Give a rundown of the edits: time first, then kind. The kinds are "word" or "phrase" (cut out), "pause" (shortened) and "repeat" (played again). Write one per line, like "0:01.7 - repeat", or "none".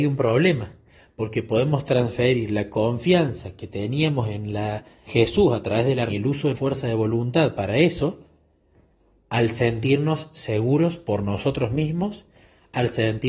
0:05.1 - word
0:06.1 - word
0:06.5 - word